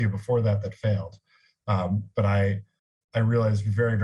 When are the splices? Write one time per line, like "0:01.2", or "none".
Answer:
none